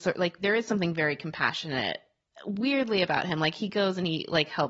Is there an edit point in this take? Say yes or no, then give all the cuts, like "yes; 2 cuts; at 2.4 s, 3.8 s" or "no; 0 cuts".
no; 0 cuts